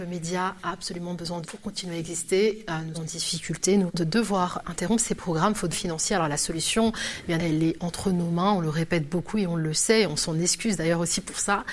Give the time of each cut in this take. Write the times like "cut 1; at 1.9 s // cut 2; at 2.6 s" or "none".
cut 1; at 1.4 s // cut 2; at 2.9 s // cut 3; at 3.9 s // cut 4; at 4.6 s // cut 5; at 5.7 s // cut 6; at 7.4 s